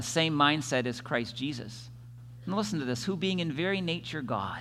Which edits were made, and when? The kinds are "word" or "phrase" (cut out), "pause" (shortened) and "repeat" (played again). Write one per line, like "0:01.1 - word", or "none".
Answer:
none